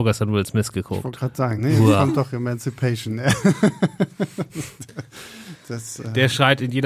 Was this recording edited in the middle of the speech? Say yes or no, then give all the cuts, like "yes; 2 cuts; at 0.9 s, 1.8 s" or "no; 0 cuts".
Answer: no; 0 cuts